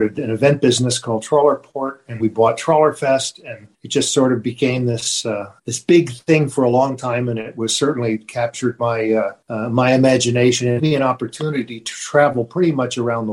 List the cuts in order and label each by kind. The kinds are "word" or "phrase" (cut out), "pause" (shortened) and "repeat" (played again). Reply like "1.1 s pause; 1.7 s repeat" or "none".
2.2 s word; 3.7 s pause; 5.6 s pause; 9.4 s pause; 10.8 s phrase